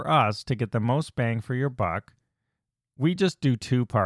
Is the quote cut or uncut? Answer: uncut